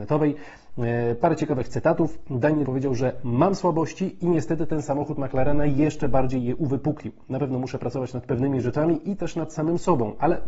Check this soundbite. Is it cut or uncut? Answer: cut